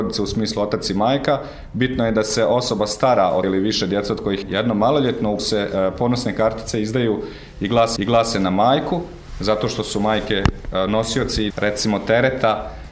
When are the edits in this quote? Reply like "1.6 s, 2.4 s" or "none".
3.4 s, 4.4 s, 5.4 s, 8.0 s, 11.5 s